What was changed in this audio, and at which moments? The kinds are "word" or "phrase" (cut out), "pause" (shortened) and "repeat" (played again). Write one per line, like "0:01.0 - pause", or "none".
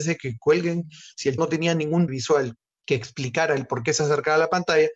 0:01.4 - word
0:02.1 - word

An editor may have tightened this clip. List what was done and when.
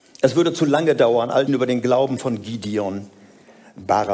0:01.5 - phrase

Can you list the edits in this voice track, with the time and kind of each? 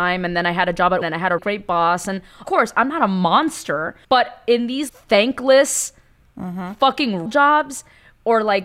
0:01.0 - word
0:01.4 - word
0:02.4 - word
0:04.0 - pause
0:04.9 - word
0:07.3 - word

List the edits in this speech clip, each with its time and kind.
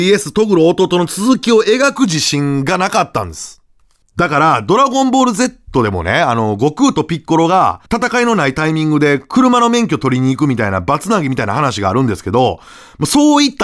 0:07.9 - pause

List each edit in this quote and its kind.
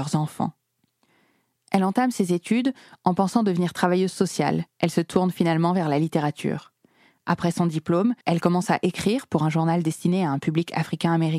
0:04.7 - pause
0:08.2 - pause

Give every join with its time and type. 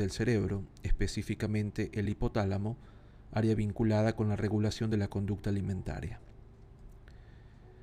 none

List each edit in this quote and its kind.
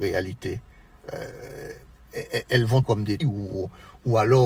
0:02.8 - word
0:03.2 - word

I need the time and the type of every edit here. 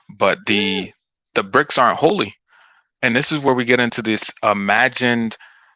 none

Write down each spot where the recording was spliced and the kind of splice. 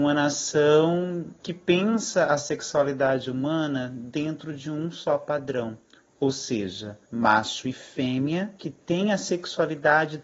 0:01.4 - pause
0:07.0 - pause
0:08.6 - pause

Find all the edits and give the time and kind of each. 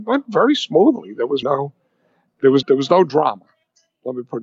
0:01.4 - word
0:02.3 - word
0:02.6 - word

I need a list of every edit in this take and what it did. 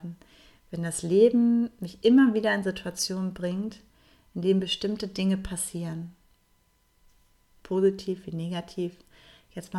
none

